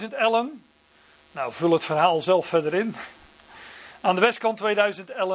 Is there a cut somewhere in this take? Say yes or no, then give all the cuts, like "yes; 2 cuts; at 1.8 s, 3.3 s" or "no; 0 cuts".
no; 0 cuts